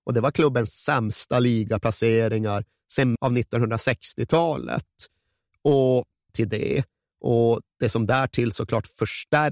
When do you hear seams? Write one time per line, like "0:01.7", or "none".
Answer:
0:03.2
0:06.3